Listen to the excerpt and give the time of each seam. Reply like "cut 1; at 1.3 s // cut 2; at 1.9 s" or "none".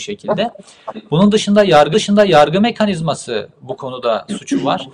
cut 1; at 1.9 s

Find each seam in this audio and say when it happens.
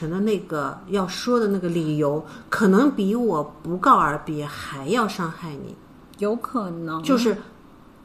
none

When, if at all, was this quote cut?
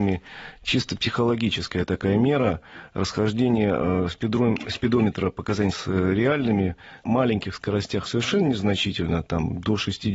cut 1; at 5.7 s // cut 2; at 7.0 s // cut 3; at 8.1 s

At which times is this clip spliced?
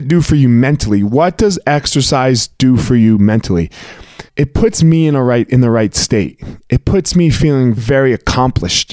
cut 1; at 4.3 s // cut 2; at 7.8 s

